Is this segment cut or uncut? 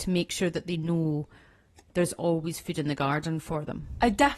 uncut